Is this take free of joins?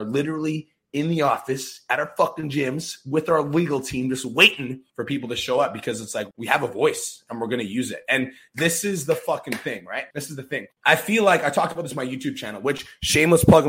yes; 0 cuts

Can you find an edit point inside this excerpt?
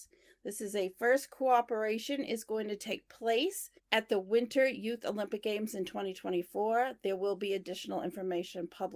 yes; 1 cut; at 3.8 s

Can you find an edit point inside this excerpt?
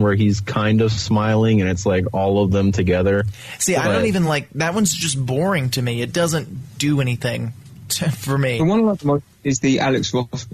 no; 0 cuts

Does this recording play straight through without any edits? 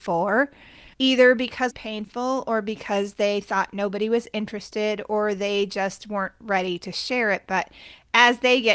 no; 2 cuts; at 0.9 s, 1.7 s

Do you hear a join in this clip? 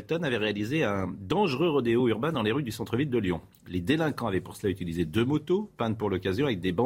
no; 0 cuts

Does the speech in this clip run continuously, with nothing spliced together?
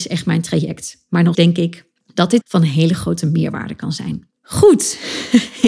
no; 4 cuts; at 1.3 s, 2.0 s, 2.4 s, 4.4 s

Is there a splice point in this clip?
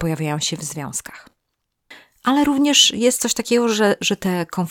no; 0 cuts

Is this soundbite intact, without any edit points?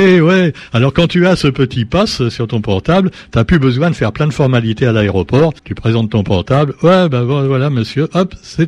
no; 1 cut; at 5.6 s

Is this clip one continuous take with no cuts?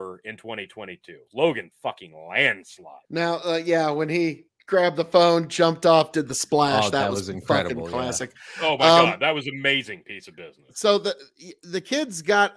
no; 3 cuts; at 1.7 s, 3.0 s, 4.5 s

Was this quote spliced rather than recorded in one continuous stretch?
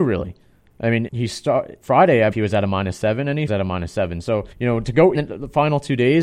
yes; 6 cuts; at 1.1 s, 1.8 s, 2.3 s, 3.5 s, 4.5 s, 5.1 s

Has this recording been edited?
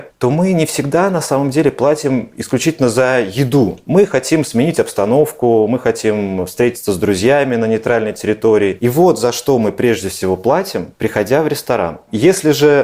no; 0 cuts

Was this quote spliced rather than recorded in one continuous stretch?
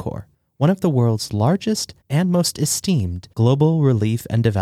yes; 2 cuts; at 2.0 s, 3.3 s

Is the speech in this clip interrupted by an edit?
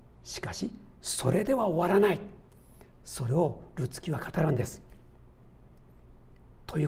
no; 0 cuts

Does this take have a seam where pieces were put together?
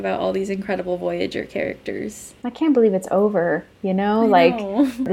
no; 0 cuts

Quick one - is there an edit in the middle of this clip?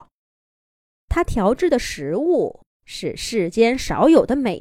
yes; 1 cut; at 2.7 s

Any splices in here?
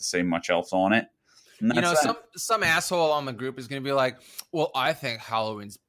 no; 0 cuts

